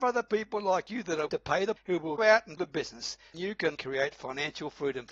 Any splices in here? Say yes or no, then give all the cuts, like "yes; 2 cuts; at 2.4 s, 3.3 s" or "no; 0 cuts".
yes; 6 cuts; at 1.3 s, 1.8 s, 2.2 s, 2.6 s, 3.3 s, 3.7 s